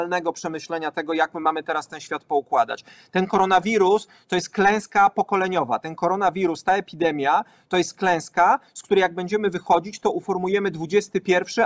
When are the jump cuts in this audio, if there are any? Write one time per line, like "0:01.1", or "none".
none